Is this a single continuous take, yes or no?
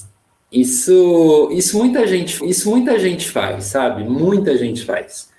no